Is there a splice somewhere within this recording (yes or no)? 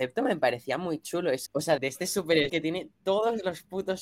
yes